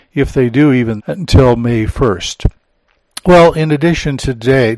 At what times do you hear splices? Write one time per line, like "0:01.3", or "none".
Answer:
0:01.0

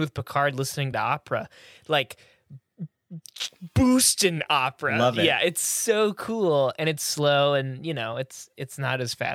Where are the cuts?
none

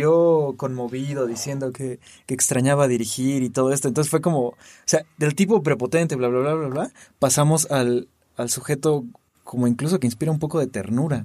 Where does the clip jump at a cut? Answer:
none

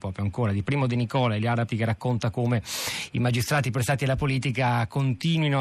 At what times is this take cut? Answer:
0:01.7

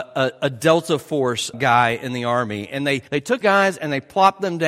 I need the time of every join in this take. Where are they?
0:01.5
0:03.1
0:03.4

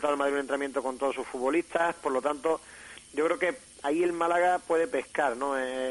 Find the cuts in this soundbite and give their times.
none

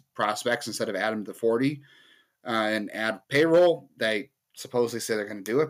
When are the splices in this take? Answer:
0:03.2

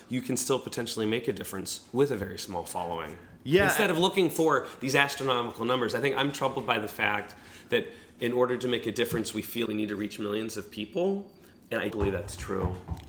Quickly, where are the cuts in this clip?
0:09.7
0:11.9

